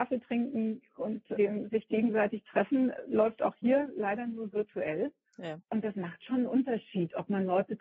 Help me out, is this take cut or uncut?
uncut